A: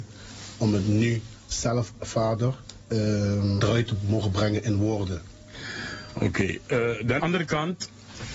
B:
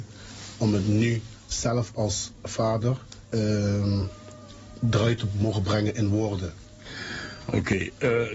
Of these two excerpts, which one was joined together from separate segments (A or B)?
A